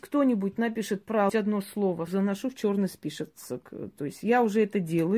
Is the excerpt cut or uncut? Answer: cut